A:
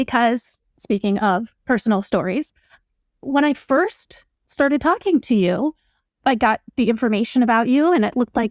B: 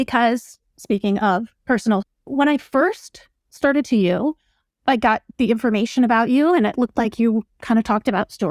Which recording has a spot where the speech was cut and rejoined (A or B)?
B